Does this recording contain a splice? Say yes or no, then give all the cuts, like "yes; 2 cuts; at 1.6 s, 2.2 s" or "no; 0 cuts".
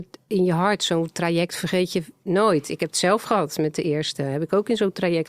no; 0 cuts